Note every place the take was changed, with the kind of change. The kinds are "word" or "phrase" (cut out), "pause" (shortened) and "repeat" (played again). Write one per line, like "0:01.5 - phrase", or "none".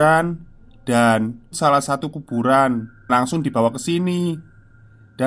0:01.5 - word
0:02.1 - word
0:03.1 - word